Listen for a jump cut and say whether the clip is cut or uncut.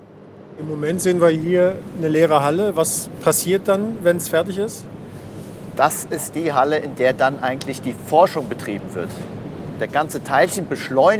uncut